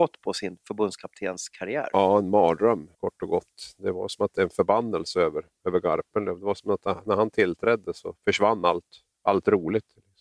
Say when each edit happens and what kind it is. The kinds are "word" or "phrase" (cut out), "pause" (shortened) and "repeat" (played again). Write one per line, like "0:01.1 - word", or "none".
0:02.9 - pause